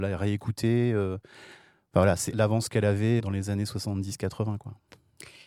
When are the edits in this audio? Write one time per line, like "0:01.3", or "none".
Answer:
0:02.3
0:03.2